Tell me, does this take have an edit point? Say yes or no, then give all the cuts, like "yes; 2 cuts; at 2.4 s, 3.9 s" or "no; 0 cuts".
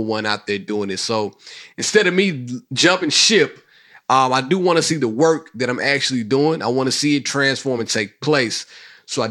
no; 0 cuts